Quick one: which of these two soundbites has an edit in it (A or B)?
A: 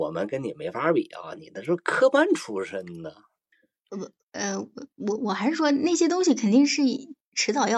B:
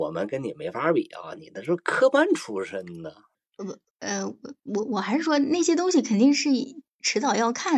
B